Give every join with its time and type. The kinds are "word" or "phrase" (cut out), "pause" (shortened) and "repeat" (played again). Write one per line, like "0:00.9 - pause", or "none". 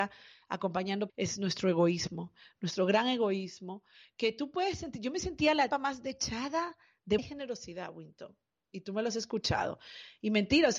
0:01.1 - word
0:05.7 - word
0:07.2 - word